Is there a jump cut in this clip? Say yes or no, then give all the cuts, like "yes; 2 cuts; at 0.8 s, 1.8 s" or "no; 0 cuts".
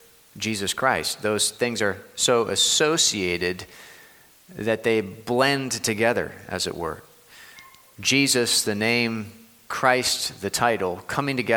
no; 0 cuts